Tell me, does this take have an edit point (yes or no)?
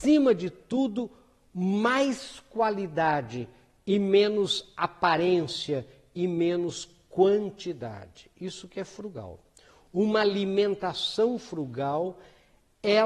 no